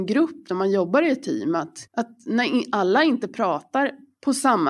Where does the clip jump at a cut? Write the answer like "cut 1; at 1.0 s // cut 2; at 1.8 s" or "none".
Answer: cut 1; at 1.9 s